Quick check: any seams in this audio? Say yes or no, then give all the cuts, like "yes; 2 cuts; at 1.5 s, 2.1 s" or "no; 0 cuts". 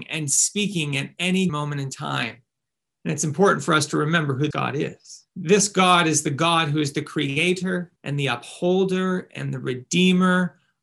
yes; 5 cuts; at 1.5 s, 2.5 s, 4.5 s, 5.3 s, 8.0 s